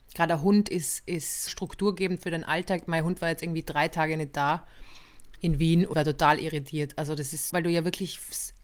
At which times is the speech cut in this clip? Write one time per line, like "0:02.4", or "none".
0:01.5
0:05.9
0:07.5